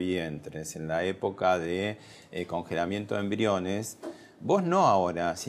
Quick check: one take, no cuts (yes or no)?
yes